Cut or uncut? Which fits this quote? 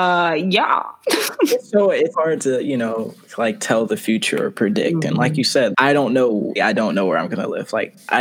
cut